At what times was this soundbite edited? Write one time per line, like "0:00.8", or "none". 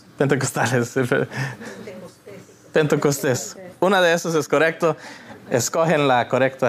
none